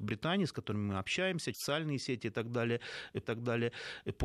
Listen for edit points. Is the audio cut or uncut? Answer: cut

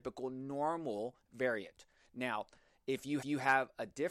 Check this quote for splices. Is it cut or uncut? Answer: cut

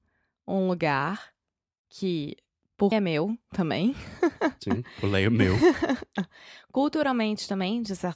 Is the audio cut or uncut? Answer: cut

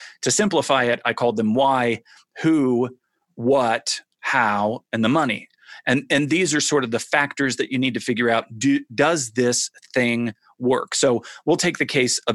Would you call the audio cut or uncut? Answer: uncut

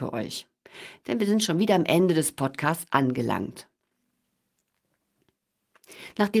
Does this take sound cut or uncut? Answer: uncut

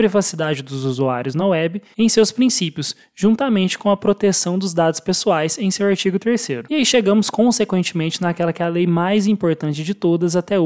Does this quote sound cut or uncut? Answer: uncut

